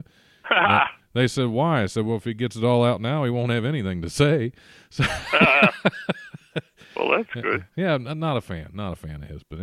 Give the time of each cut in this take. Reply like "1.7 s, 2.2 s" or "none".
none